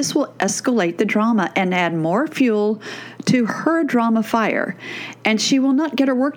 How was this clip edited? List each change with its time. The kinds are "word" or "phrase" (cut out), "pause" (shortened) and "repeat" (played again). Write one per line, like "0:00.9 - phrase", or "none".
none